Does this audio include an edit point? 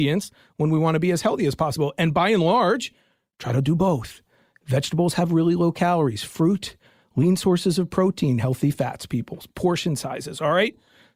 no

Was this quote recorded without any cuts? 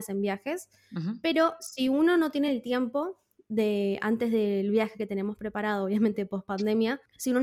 yes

